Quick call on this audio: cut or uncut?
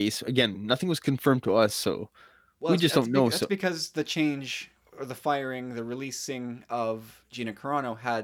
uncut